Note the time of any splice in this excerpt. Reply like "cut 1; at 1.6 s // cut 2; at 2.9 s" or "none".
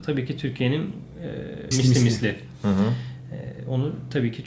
cut 1; at 1.7 s